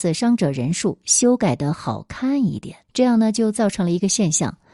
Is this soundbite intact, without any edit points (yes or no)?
no